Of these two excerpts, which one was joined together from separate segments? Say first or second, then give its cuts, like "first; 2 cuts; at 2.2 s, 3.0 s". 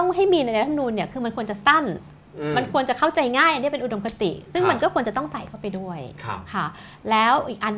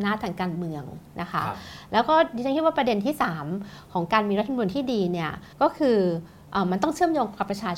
second; 1 cut; at 5.5 s